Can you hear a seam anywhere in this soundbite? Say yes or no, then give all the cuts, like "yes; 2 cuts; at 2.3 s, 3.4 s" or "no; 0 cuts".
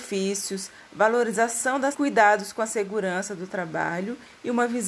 yes; 1 cut; at 1.9 s